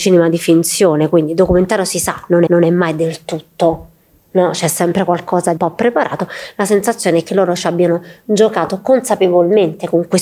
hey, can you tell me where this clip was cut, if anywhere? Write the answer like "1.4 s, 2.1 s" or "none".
2.5 s, 5.6 s

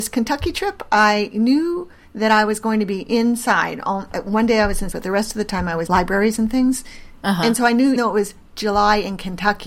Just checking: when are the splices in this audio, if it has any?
4.9 s, 5.9 s, 8.0 s

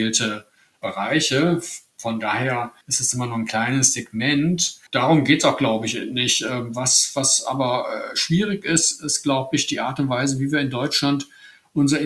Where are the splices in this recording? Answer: 2.8 s, 4.9 s

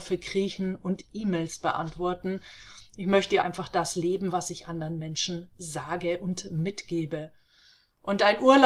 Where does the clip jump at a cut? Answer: 3.4 s

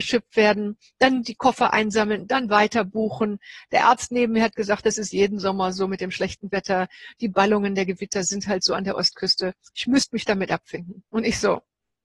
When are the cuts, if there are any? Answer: 9.6 s, 11.1 s

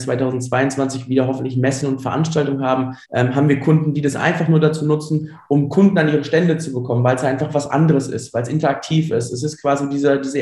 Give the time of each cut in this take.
3.0 s

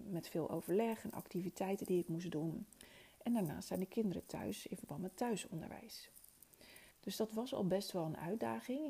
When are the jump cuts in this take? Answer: 6.9 s

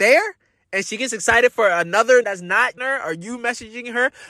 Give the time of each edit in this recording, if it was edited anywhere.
2.2 s, 2.8 s

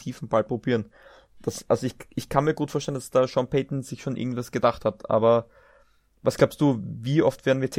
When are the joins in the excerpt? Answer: none

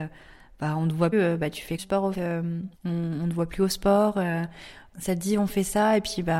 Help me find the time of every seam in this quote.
1.1 s, 1.8 s, 2.1 s, 2.7 s, 4.9 s

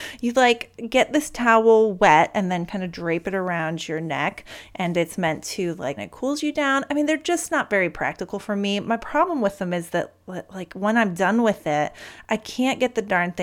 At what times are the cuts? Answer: 6.0 s

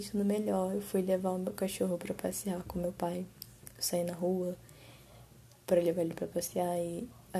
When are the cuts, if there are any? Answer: none

